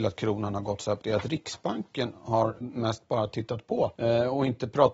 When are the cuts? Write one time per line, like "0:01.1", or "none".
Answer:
0:01.0
0:02.6
0:04.0